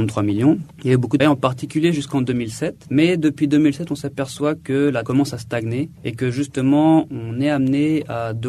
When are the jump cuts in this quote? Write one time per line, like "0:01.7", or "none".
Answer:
0:01.2
0:05.0